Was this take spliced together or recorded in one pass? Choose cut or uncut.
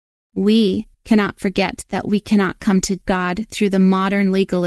cut